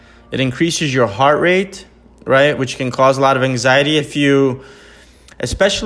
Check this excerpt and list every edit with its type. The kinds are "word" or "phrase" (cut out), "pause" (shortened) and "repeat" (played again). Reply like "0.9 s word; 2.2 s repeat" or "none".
4.0 s word